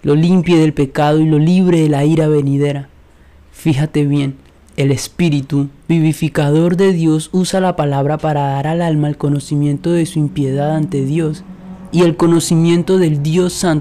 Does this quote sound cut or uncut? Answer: uncut